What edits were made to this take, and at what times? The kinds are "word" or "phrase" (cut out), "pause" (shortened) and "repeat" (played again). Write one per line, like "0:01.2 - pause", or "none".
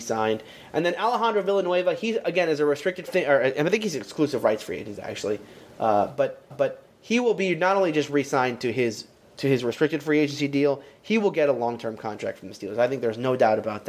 0:03.1 - phrase
0:06.5 - repeat
0:09.2 - word